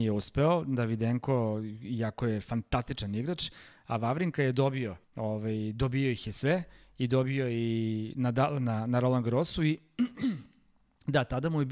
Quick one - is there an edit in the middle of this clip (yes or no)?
yes